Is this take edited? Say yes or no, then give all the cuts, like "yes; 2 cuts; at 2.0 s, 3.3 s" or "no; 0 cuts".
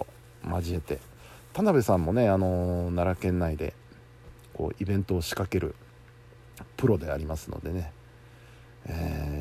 no; 0 cuts